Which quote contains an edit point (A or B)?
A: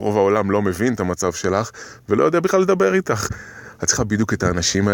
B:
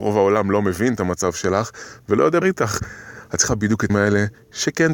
B